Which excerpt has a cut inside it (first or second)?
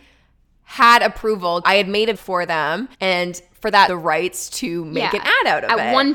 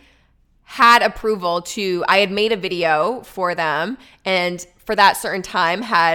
first